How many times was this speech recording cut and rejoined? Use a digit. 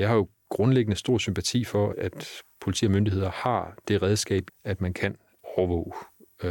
2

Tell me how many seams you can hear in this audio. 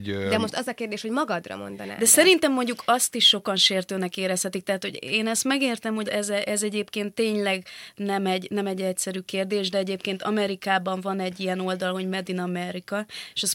1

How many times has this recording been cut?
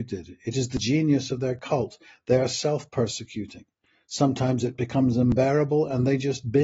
0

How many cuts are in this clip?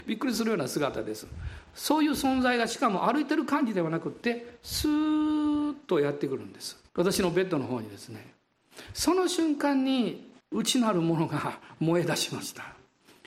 2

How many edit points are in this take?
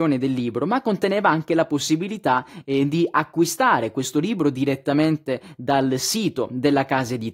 0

